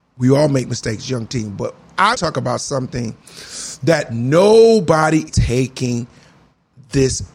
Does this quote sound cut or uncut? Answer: cut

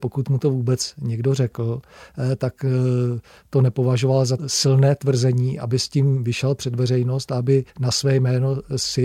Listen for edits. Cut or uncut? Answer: cut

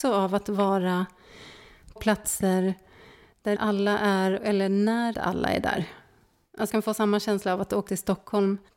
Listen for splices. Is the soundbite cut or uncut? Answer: cut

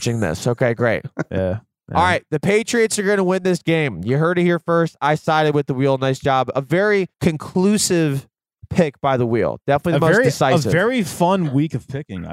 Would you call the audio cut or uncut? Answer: cut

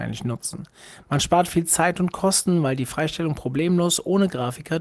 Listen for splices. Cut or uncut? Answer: uncut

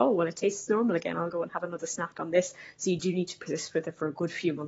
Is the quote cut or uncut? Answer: uncut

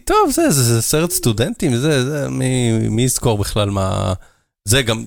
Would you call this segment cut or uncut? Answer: uncut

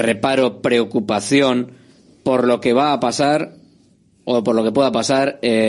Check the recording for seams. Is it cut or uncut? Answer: uncut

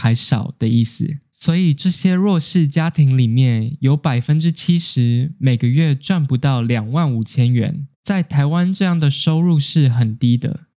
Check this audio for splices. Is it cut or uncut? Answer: cut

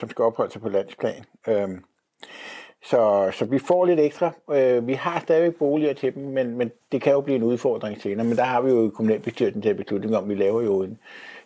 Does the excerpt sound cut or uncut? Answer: uncut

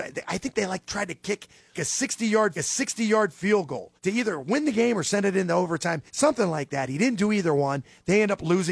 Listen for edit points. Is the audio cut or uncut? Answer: cut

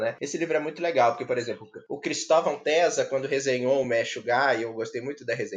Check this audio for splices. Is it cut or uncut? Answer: uncut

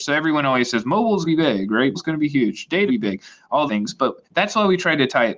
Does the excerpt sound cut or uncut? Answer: cut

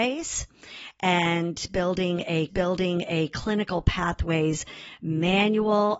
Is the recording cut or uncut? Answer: cut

